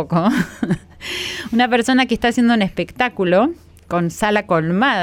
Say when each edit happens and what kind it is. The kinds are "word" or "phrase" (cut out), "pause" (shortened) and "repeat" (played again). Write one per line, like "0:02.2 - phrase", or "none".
none